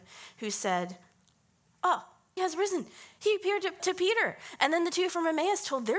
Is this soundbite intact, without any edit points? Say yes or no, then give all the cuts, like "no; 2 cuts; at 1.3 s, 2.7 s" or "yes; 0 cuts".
no; 2 cuts; at 2.4 s, 3.8 s